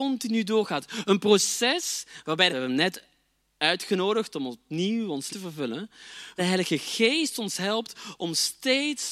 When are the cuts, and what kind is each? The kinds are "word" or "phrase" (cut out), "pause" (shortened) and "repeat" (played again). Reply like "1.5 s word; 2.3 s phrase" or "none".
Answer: 2.5 s phrase; 5.3 s word; 6.4 s phrase